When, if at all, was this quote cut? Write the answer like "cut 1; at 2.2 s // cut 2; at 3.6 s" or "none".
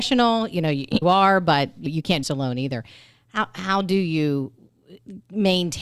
cut 1; at 1.0 s // cut 2; at 1.9 s // cut 3; at 2.2 s